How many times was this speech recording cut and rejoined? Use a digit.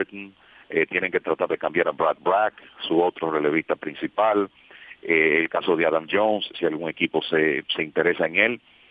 0